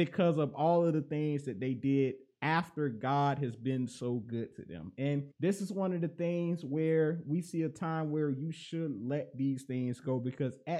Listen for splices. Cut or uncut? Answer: cut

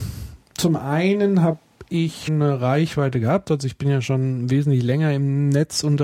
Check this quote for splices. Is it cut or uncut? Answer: cut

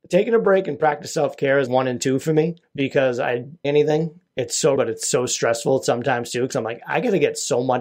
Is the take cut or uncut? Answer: cut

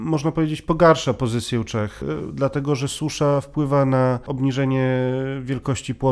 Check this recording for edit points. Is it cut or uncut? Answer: uncut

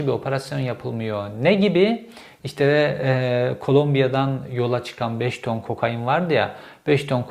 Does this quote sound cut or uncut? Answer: uncut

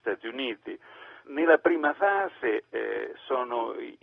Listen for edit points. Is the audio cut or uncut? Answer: cut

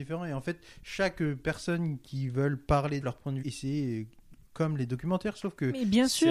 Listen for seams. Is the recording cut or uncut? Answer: cut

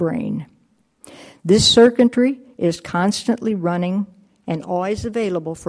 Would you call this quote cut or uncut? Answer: uncut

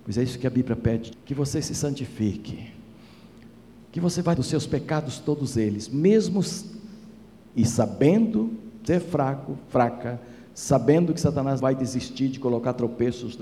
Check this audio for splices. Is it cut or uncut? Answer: cut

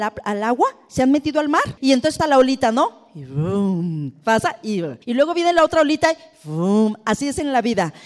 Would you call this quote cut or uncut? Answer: cut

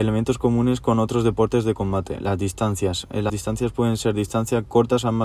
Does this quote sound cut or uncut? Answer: cut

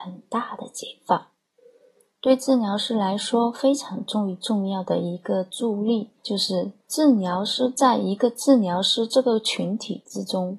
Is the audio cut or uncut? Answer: cut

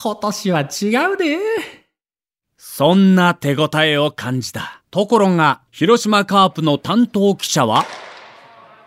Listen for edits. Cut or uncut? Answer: cut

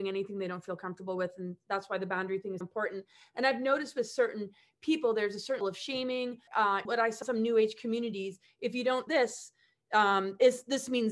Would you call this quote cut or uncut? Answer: cut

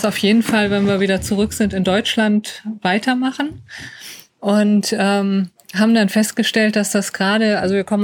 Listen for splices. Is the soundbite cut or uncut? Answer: cut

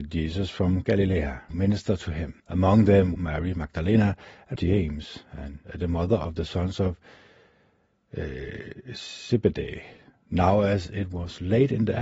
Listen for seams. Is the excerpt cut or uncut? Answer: cut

